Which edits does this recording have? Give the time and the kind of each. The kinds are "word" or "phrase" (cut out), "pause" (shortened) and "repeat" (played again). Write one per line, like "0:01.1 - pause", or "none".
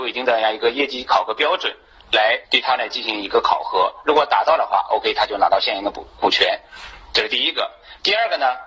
0:02.4 - pause